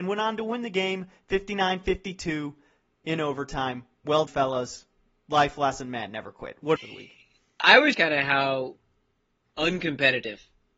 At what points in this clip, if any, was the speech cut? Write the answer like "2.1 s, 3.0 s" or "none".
4.3 s, 6.8 s, 7.9 s